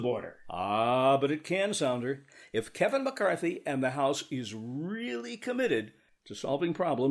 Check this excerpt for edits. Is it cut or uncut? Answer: uncut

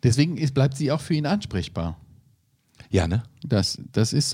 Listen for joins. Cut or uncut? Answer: cut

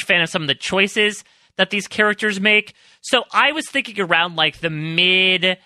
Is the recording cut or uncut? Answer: uncut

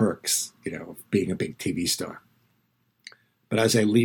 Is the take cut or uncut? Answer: uncut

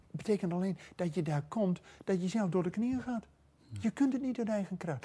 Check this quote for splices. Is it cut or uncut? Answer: uncut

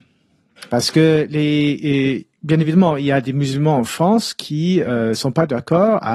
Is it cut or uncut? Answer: uncut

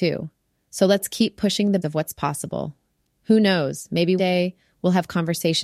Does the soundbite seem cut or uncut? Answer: cut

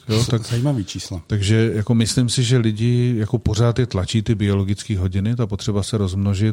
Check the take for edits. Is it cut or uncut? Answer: uncut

